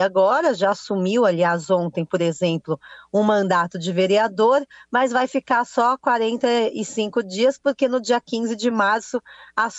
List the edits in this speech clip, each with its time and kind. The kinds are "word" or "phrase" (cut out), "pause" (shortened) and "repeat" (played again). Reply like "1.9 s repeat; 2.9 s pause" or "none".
none